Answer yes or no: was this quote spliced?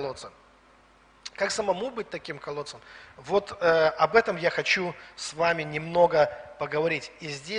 no